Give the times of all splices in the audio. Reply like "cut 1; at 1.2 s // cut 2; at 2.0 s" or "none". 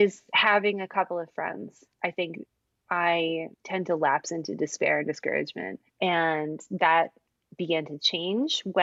cut 1; at 1.9 s // cut 2; at 3.5 s // cut 3; at 5.9 s